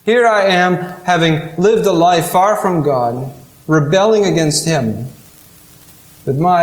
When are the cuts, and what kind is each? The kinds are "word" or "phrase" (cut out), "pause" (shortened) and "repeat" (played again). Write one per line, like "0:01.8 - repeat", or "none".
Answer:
none